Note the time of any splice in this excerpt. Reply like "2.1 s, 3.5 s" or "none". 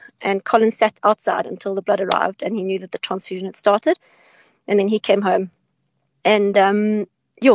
none